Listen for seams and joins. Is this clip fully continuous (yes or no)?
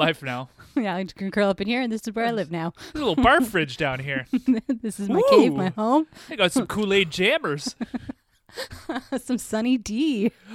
yes